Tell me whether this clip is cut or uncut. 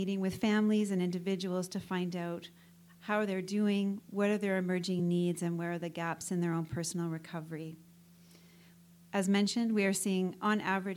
uncut